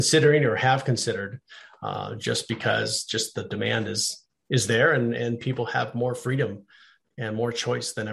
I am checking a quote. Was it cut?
no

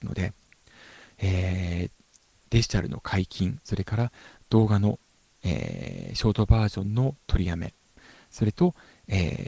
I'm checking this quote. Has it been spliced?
no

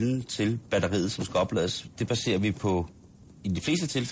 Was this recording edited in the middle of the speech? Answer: no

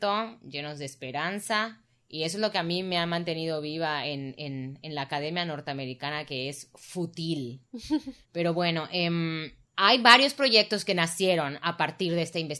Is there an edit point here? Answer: yes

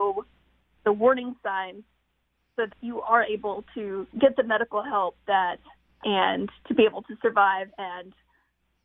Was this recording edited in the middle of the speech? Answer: yes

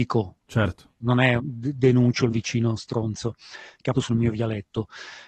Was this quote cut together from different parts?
yes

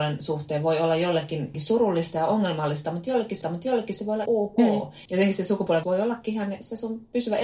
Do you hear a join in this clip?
yes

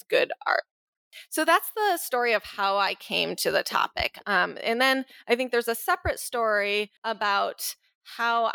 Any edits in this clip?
yes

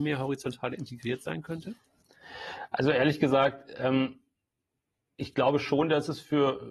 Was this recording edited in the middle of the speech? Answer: no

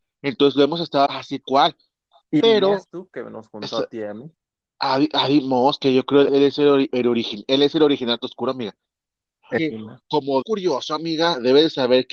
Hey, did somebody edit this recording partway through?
yes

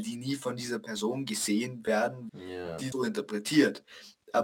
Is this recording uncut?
no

